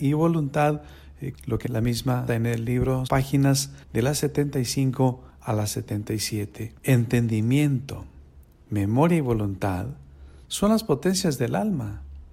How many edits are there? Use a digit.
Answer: 7